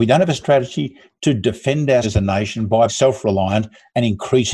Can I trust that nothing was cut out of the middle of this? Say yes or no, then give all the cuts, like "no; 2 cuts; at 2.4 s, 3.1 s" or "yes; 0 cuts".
no; 2 cuts; at 2.0 s, 2.9 s